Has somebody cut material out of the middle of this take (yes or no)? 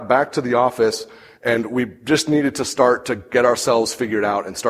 no